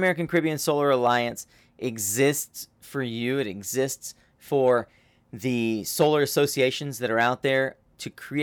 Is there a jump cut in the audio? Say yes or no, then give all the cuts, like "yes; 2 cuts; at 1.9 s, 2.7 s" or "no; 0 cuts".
no; 0 cuts